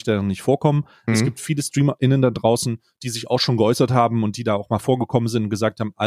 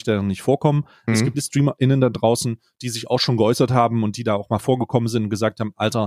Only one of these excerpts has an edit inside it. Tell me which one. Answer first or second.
second